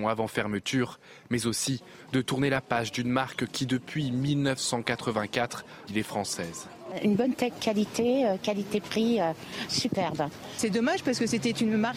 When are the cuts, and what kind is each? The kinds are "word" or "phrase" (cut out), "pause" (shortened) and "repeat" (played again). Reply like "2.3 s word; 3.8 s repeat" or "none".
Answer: 5.9 s word; 9.7 s word